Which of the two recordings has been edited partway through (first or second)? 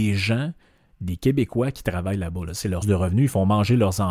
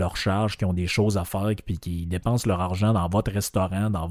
first